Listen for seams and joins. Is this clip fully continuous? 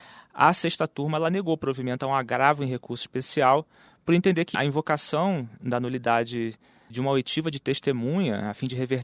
no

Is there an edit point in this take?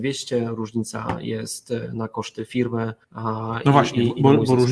yes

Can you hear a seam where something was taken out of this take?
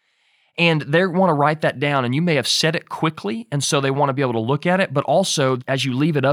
no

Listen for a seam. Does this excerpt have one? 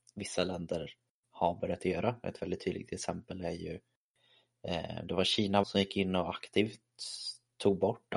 yes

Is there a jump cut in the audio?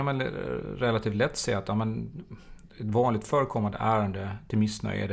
no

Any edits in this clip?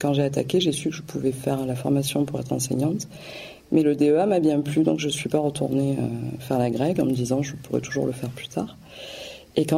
no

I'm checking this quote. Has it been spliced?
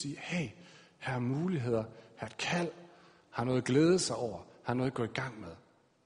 no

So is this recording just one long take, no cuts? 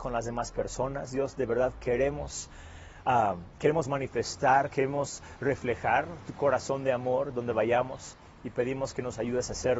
yes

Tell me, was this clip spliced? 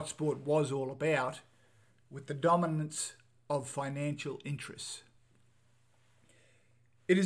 no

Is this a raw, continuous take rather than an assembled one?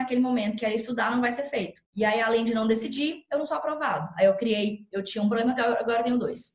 no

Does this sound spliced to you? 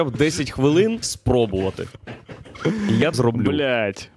yes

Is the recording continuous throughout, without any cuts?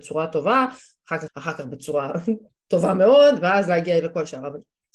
no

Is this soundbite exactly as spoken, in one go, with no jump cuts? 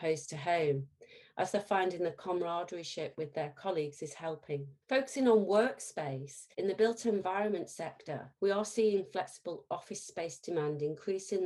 no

